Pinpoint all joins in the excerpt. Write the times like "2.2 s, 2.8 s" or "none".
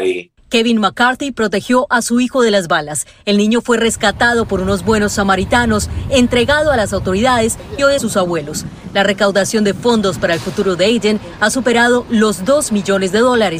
8.0 s